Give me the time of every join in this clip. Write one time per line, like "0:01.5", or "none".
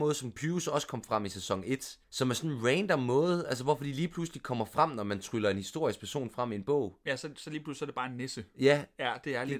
0:02.0